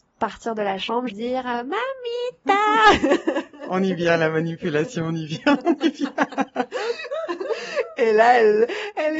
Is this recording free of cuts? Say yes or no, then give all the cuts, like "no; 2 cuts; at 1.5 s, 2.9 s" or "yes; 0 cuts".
no; 1 cut; at 1.1 s